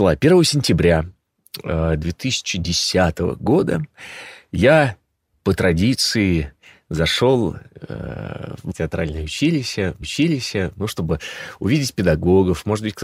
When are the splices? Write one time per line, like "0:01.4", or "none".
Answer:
0:08.7
0:10.0

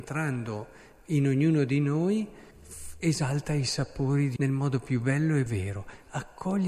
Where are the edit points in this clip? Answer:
0:02.5
0:04.4
0:05.5

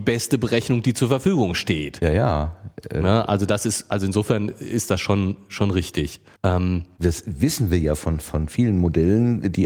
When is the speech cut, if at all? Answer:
0:06.3

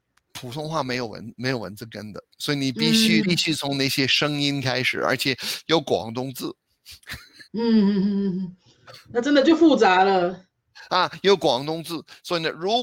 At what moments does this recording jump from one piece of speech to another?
0:02.3
0:03.2
0:07.5

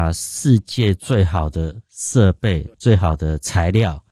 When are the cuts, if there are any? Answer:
0:02.7

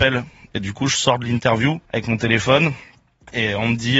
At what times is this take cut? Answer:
0:01.9

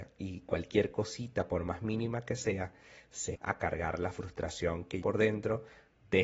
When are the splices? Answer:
0:03.3
0:05.0

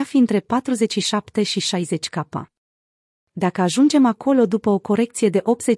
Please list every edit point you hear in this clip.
none

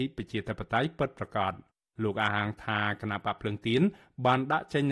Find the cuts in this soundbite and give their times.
none

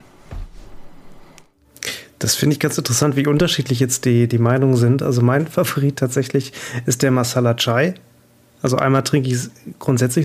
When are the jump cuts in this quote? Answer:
none

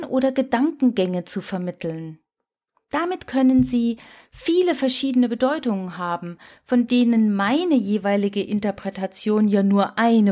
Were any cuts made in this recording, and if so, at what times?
none

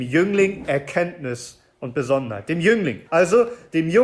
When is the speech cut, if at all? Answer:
0:03.1

